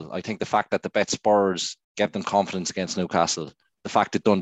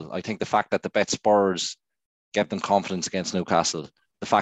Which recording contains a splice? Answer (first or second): first